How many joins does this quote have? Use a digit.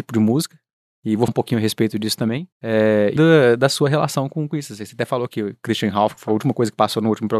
3